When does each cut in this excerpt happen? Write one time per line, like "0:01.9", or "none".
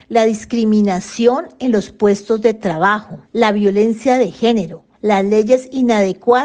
0:03.2
0:04.9